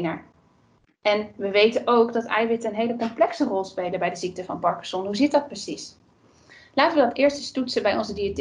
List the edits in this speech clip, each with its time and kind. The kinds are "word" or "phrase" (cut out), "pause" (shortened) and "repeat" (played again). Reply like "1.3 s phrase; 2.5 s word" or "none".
none